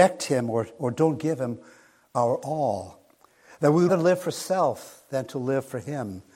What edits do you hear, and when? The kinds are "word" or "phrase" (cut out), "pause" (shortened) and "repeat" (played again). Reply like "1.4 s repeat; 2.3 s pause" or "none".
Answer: 3.9 s word

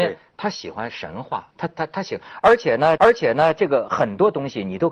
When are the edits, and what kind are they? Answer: 1.5 s pause; 3.0 s repeat

